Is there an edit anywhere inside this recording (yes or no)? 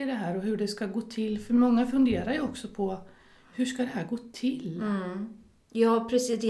no